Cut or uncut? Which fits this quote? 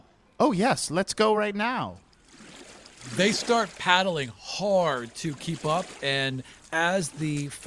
uncut